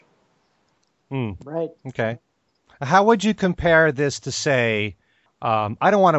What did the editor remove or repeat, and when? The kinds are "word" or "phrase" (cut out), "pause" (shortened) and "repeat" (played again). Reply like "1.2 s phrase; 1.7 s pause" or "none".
1.8 s pause

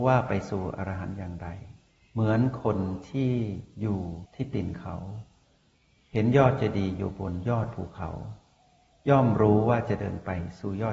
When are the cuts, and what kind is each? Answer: none

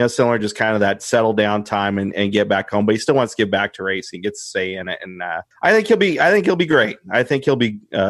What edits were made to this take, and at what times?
5.5 s pause

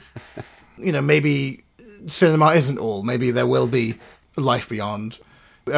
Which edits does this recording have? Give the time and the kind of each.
none

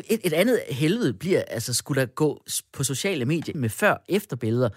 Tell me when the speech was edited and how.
3.5 s phrase

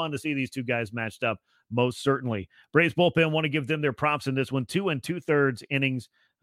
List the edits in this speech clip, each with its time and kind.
none

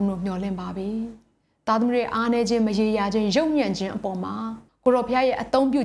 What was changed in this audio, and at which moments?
4.7 s pause

